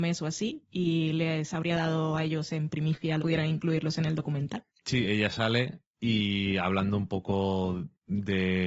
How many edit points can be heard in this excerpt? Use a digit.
1